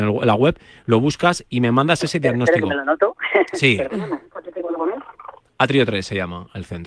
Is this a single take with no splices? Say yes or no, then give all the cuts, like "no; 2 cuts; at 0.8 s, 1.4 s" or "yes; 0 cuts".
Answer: no; 1 cut; at 5.4 s